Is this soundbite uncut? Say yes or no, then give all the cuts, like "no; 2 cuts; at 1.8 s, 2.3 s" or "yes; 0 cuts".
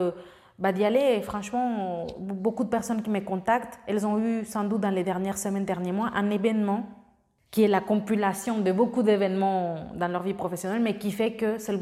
yes; 0 cuts